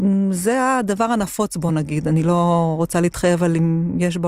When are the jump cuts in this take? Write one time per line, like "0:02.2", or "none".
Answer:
none